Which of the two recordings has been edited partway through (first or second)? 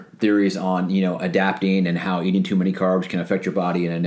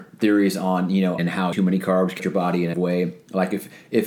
second